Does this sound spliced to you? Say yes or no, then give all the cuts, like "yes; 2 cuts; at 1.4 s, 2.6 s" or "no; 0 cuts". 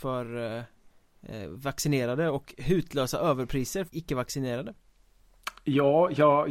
yes; 1 cut; at 3.9 s